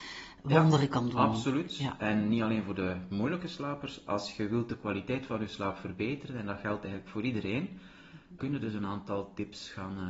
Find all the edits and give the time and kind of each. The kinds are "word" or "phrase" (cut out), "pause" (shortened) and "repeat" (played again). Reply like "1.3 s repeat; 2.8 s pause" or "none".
8.4 s word